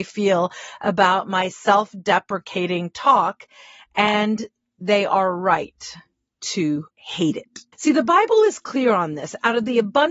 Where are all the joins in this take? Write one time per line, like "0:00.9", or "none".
0:06.9
0:07.7

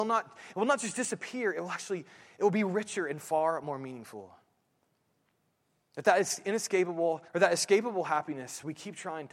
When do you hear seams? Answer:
0:07.3

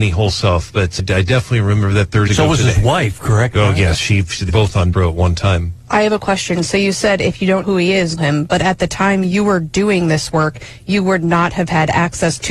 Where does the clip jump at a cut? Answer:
0:01.0
0:02.3
0:04.5
0:04.9
0:07.6
0:08.2

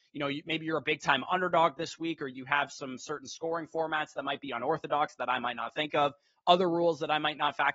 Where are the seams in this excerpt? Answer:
none

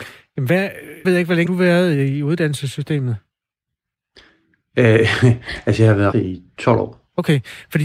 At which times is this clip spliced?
0:01.0
0:01.5
0:06.1

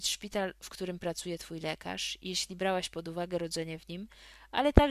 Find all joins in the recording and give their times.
none

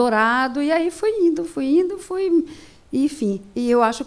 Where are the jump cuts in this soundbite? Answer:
none

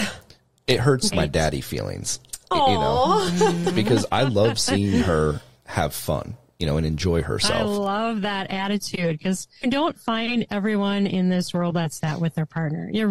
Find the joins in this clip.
0:01.1
0:04.1
0:09.6
0:12.0

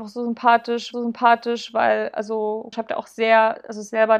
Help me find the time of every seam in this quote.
0:00.9
0:02.7

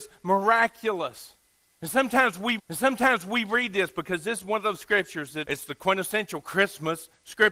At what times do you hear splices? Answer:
0:02.6
0:05.4

